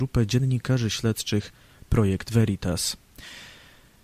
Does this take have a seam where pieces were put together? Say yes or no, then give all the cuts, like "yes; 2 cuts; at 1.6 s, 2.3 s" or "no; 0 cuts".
no; 0 cuts